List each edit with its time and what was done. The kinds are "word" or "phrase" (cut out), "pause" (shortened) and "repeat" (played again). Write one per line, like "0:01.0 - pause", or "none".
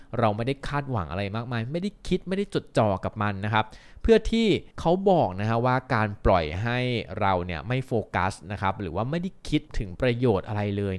0:04.7 - pause
0:09.7 - pause